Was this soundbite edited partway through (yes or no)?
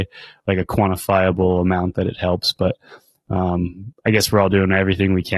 no